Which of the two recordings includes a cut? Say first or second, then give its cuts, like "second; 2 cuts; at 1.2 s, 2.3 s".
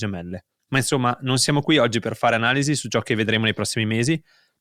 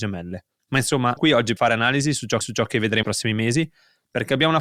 second; 4 cuts; at 1.2 s, 1.6 s, 2.4 s, 3.0 s